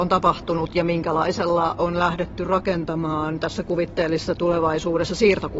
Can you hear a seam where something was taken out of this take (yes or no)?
yes